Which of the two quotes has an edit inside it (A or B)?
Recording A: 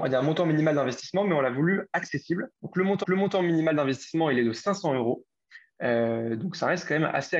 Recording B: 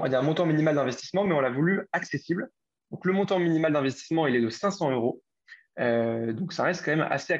A